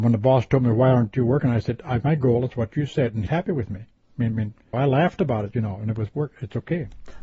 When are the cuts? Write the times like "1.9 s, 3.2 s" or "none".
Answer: 2.0 s, 3.3 s, 4.7 s